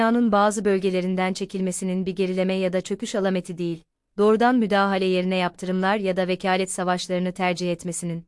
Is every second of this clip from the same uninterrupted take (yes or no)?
yes